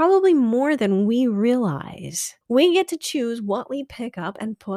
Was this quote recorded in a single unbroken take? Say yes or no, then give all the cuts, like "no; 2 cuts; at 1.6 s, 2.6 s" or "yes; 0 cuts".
no; 1 cut; at 2.4 s